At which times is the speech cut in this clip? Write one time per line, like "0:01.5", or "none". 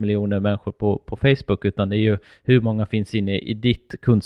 none